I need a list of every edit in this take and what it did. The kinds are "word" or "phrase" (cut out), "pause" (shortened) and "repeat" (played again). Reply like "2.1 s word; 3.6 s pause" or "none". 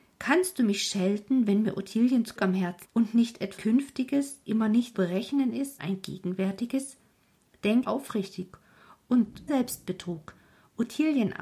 2.4 s word; 2.8 s word; 3.6 s word; 4.4 s word; 4.9 s word; 5.8 s word; 7.8 s word; 9.5 s word

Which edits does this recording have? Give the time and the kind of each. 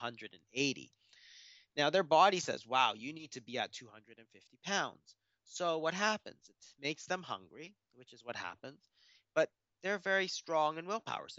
none

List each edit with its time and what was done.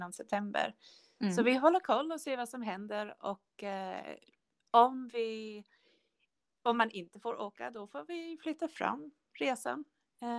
none

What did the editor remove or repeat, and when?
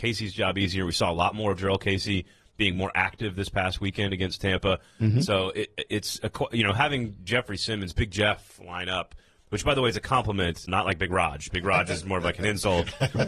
10.7 s word

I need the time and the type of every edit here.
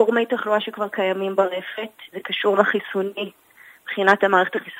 2.1 s word; 2.5 s word

